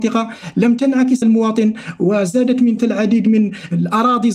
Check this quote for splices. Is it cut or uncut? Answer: cut